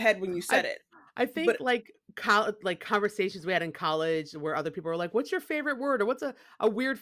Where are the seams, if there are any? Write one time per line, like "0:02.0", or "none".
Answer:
none